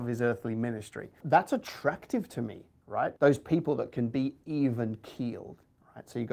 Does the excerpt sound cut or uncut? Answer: cut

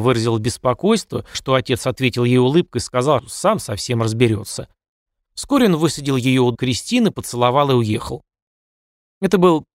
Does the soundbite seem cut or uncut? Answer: cut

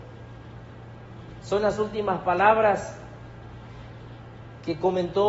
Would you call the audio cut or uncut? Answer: uncut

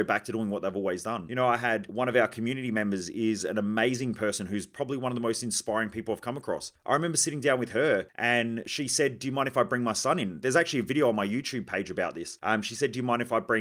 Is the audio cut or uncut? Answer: uncut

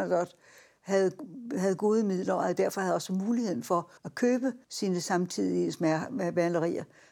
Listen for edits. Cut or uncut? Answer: cut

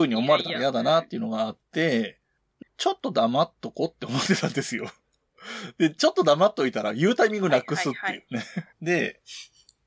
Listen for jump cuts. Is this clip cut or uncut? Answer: cut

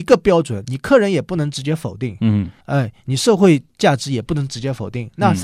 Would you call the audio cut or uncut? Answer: cut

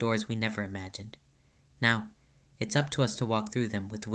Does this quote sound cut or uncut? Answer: uncut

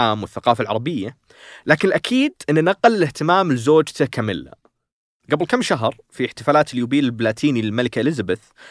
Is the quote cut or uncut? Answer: uncut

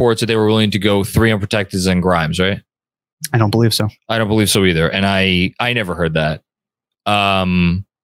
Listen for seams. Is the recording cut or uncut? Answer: uncut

